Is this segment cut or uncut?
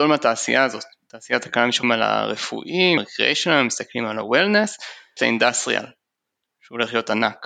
cut